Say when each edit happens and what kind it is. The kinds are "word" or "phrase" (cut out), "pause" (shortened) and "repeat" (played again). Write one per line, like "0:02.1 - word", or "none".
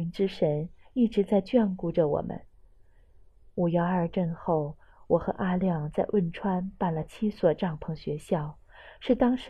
none